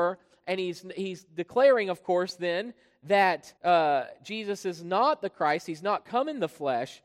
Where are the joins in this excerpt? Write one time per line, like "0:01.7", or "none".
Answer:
0:03.6